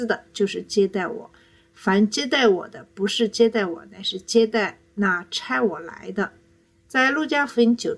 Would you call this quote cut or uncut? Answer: uncut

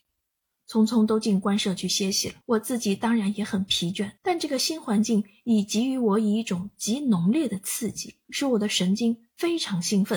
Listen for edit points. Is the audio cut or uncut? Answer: cut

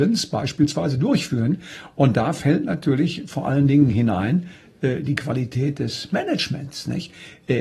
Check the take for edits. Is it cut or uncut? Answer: uncut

